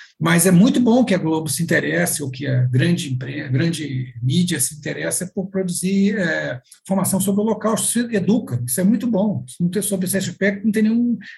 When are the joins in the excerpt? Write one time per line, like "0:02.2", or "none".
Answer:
none